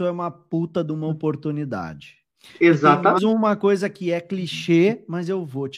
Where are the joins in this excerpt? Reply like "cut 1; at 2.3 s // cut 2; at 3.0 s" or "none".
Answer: cut 1; at 2.3 s // cut 2; at 3.2 s